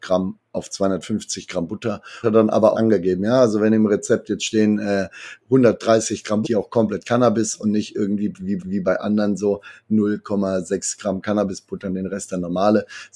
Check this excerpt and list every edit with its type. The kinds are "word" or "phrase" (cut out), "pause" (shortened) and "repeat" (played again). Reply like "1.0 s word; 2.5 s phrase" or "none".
2.2 s phrase; 2.7 s phrase; 5.4 s pause; 6.4 s phrase; 8.6 s repeat